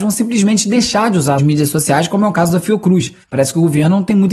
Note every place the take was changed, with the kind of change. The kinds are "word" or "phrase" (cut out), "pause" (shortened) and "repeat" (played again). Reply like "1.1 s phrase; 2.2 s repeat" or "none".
1.4 s word; 3.2 s pause